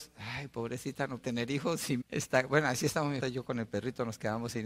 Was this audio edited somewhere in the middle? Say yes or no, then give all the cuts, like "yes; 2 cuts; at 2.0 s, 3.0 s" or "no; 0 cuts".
yes; 3 cuts; at 1.2 s, 2.0 s, 3.2 s